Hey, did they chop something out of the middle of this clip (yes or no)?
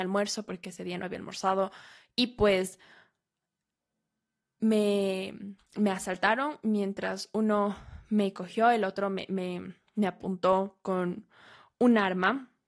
no